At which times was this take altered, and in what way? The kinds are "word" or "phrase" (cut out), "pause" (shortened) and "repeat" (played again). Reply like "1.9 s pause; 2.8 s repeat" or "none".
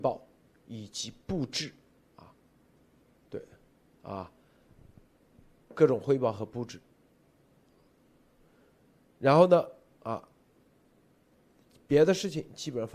none